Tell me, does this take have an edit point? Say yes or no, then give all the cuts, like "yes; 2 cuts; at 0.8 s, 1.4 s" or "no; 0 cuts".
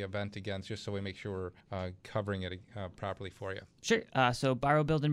yes; 1 cut; at 1.6 s